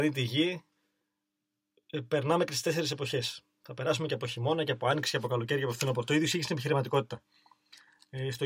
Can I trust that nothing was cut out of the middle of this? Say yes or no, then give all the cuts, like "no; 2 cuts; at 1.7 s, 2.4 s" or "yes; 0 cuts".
yes; 0 cuts